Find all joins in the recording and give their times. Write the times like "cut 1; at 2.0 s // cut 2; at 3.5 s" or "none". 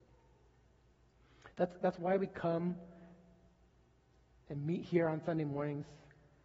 none